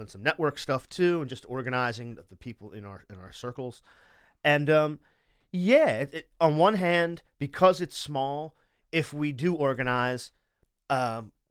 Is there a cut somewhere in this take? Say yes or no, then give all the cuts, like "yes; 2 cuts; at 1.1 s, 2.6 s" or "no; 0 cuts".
no; 0 cuts